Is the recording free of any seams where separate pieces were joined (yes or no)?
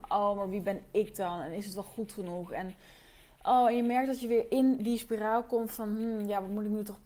yes